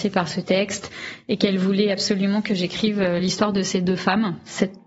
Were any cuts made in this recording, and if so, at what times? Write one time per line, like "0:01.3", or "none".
none